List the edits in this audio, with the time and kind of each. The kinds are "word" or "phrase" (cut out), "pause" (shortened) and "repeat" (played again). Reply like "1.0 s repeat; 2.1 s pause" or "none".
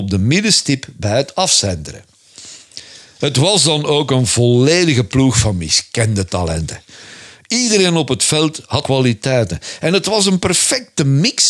8.8 s word